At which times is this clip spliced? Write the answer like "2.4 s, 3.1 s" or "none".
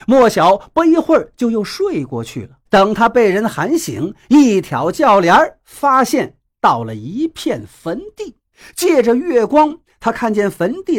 2.7 s, 8.5 s